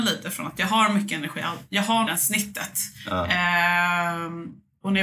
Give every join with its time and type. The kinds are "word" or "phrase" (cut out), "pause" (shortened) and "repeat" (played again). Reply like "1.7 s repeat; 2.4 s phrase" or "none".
2.1 s phrase